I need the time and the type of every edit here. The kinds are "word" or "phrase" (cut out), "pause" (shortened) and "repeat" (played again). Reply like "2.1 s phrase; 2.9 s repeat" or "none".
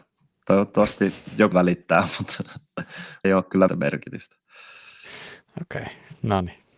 1.5 s word; 3.2 s word; 3.7 s word